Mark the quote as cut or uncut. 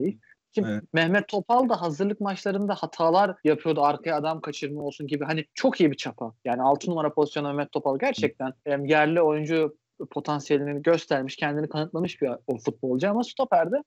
cut